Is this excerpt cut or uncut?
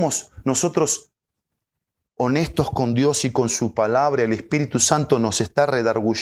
uncut